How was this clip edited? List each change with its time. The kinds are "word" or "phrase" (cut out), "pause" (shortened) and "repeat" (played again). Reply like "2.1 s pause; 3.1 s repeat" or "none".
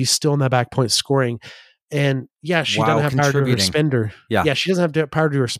none